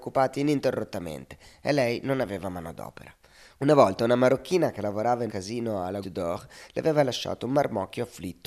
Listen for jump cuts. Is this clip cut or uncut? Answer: cut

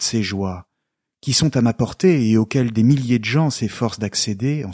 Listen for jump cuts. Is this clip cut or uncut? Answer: uncut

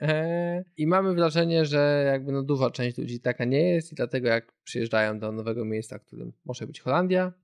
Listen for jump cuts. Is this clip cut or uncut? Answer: uncut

